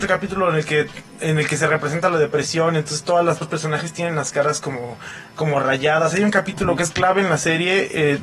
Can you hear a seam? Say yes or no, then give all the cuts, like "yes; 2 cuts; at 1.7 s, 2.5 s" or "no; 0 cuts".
yes; 1 cut; at 3.4 s